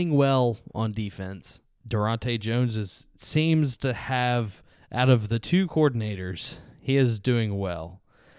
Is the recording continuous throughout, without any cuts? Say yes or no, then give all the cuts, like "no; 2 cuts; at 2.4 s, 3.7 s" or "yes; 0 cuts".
yes; 0 cuts